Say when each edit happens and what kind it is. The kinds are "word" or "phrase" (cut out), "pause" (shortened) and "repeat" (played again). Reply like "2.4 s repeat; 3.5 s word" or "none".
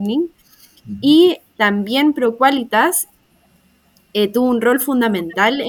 none